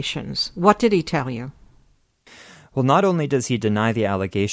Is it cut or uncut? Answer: uncut